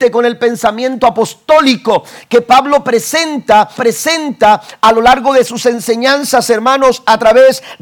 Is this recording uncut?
no; 1 cut; at 3.8 s

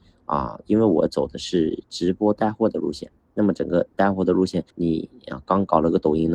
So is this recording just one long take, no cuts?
no; 1 cut; at 4.7 s

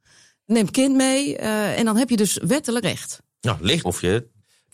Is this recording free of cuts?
no; 3 cuts; at 1.7 s, 2.8 s, 3.8 s

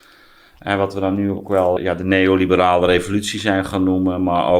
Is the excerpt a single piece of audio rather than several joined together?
no; 1 cut; at 1.8 s

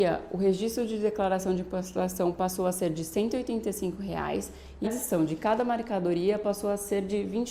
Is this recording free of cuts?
no; 1 cut; at 4.8 s

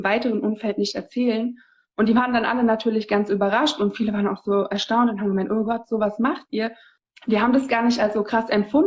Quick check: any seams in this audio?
no; 0 cuts

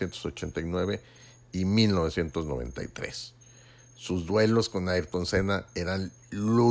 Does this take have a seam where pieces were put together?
no; 0 cuts

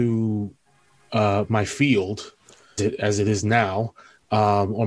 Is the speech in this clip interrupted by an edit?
yes; 1 cut; at 2.8 s

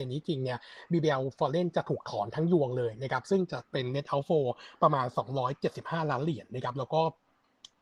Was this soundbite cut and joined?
no; 0 cuts

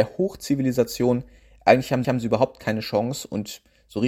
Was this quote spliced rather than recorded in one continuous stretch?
yes; 1 cut; at 2.0 s

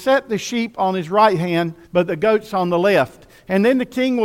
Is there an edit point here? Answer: yes; 1 cut; at 1.8 s

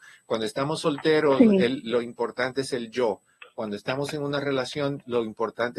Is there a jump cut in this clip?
no; 0 cuts

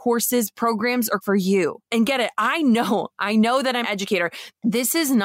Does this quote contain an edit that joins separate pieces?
yes; 3 cuts; at 1.2 s, 1.9 s, 3.8 s

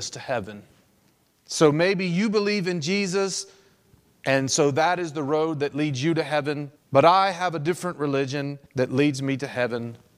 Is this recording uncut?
no; 2 cuts; at 6.7 s, 8.6 s

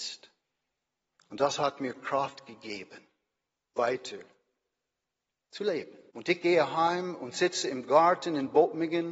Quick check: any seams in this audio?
yes; 2 cuts; at 3.8 s, 6.1 s

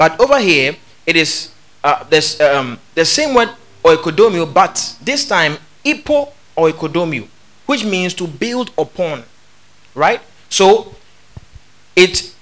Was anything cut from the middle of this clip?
no; 0 cuts

